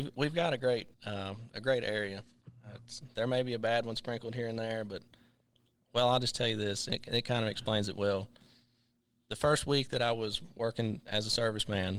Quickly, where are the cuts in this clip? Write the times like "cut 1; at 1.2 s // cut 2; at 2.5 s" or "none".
cut 1; at 0.9 s